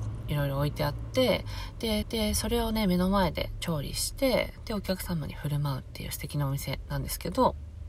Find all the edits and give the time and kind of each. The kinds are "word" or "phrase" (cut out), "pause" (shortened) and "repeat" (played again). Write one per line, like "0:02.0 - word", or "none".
0:02.0 - repeat